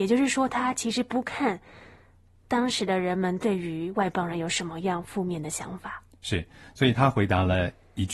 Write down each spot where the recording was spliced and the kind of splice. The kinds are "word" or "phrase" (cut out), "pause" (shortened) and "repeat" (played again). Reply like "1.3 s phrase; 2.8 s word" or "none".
none